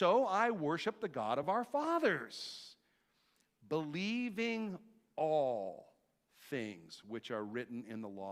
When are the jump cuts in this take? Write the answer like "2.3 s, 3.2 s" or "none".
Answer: none